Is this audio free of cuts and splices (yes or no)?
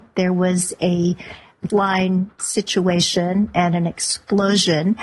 no